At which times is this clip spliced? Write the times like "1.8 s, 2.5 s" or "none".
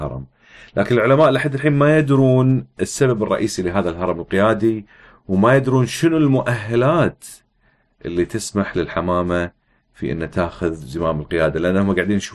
none